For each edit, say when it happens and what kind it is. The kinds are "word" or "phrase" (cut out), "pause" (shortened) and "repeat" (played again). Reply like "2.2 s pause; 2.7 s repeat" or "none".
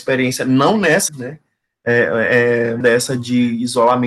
1.1 s word; 2.8 s word